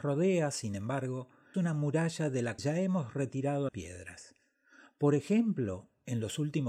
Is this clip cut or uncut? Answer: cut